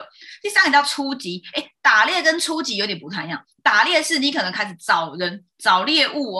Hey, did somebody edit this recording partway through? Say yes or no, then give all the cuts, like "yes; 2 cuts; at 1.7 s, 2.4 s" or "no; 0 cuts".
no; 0 cuts